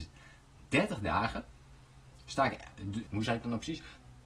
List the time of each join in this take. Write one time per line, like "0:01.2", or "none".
0:03.1

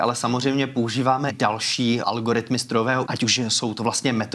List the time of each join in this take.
0:01.3
0:02.0
0:03.0

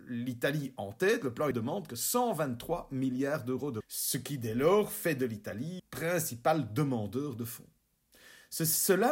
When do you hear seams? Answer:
0:01.5
0:01.9
0:03.8
0:05.8

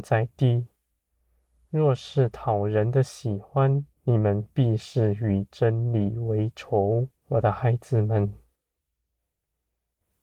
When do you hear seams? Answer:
0:03.9
0:07.2

